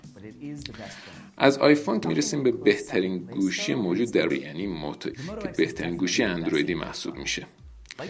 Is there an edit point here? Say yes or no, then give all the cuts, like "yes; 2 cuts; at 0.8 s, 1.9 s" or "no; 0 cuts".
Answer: yes; 3 cuts; at 2.0 s, 4.3 s, 5.1 s